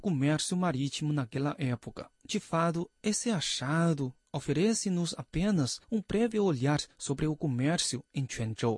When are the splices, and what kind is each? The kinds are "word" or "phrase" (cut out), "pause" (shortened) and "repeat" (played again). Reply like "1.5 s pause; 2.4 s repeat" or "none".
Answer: 2.2 s pause; 5.8 s pause; 6.9 s pause